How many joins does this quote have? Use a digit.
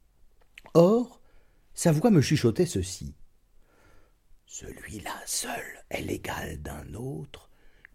0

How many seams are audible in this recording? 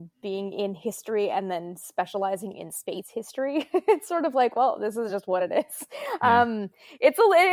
0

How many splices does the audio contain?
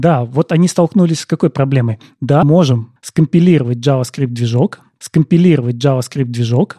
2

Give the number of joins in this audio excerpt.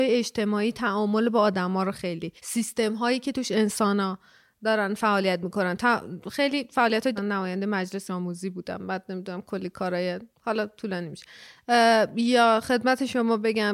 4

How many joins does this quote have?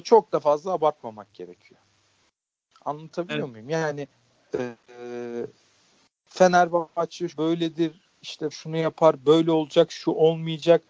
2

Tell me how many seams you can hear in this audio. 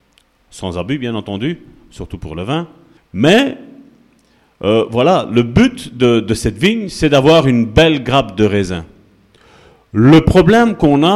1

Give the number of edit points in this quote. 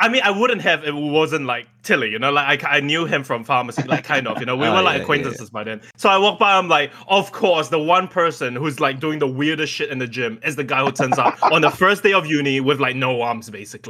1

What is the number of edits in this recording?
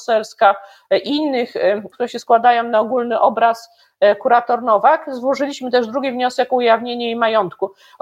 1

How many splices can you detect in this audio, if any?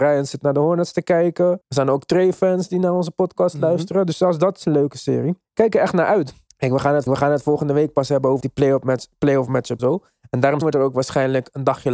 7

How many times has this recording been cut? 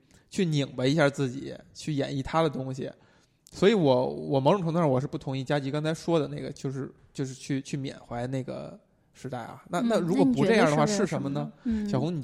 0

